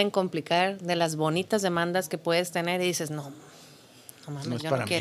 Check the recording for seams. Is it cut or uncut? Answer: uncut